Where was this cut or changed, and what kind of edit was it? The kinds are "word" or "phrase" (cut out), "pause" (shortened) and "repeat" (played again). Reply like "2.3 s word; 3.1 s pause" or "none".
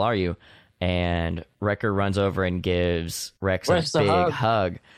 1.5 s pause; 3.4 s pause